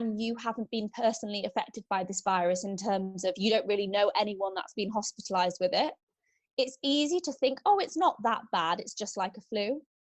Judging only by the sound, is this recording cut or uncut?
uncut